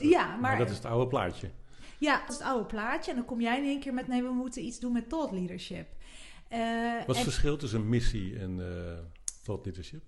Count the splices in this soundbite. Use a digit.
1